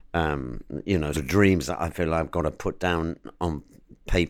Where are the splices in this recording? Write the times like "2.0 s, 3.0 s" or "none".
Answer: 1.1 s